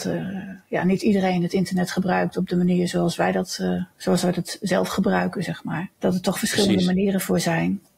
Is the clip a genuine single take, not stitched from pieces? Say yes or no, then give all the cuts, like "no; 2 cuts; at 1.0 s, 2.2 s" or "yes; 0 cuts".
no; 2 cuts; at 3.9 s, 5.9 s